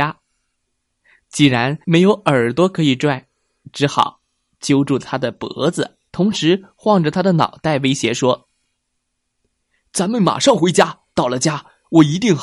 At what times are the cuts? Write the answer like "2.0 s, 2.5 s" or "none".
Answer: 1.8 s, 6.1 s, 11.1 s